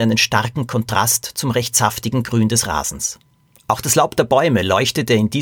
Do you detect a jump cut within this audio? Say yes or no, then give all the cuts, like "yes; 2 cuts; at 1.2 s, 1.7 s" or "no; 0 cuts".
no; 0 cuts